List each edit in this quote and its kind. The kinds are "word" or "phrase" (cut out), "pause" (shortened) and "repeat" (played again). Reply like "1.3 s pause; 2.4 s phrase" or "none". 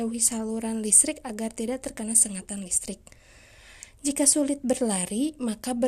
none